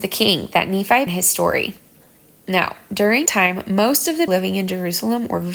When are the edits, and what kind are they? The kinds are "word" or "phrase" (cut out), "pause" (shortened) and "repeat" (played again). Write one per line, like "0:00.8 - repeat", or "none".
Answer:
0:01.1 - word
0:03.3 - word
0:04.3 - word